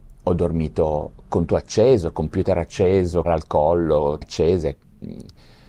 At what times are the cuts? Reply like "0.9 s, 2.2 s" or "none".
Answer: 1.5 s, 3.2 s, 4.2 s